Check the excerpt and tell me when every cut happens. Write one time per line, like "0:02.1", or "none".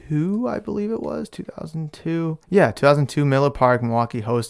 0:02.4